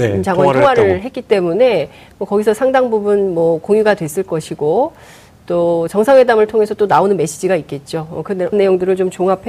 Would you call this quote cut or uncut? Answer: cut